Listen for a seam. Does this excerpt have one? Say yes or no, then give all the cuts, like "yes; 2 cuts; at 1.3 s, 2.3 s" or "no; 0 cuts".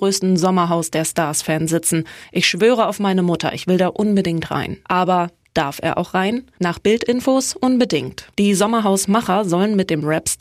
yes; 3 cuts; at 4.8 s, 6.5 s, 8.3 s